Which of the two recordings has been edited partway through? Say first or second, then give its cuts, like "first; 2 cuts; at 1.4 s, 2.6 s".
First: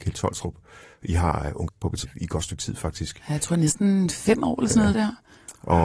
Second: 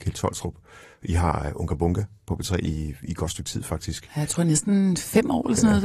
first; 3 cuts; at 1.7 s, 2.0 s, 4.9 s